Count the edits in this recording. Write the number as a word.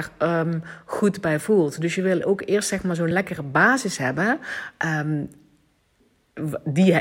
zero